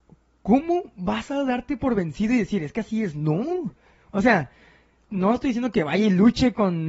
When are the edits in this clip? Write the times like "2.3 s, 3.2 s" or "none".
5.1 s